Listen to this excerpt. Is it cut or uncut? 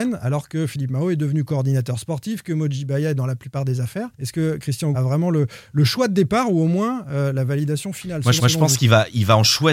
cut